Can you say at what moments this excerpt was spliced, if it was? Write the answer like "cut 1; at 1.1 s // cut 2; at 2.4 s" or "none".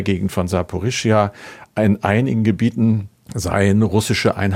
none